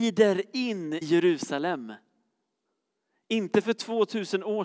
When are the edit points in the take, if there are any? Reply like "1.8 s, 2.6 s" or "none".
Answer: 1.0 s